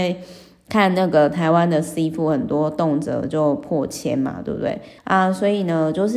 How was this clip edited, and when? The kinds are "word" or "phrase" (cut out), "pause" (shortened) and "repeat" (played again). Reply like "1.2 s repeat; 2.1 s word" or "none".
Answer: 5.0 s pause